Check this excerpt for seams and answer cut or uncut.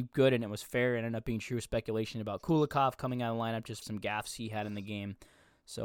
cut